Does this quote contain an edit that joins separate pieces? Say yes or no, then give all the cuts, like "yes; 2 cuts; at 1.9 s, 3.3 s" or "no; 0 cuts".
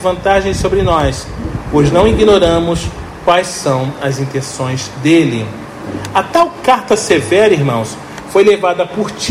no; 0 cuts